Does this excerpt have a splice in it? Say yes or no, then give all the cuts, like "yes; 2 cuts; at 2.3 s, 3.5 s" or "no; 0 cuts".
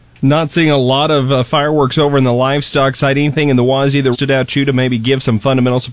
yes; 1 cut; at 4.1 s